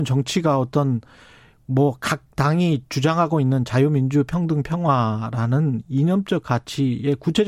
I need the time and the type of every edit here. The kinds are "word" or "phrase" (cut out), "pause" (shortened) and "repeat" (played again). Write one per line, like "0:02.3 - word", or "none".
none